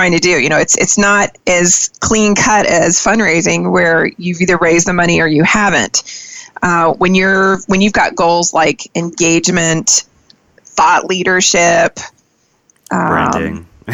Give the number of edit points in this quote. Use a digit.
2